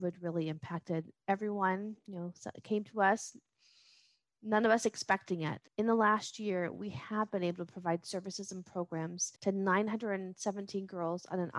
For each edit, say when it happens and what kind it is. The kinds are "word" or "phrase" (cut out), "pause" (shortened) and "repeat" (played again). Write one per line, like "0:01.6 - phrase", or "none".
0:05.7 - pause
0:09.4 - pause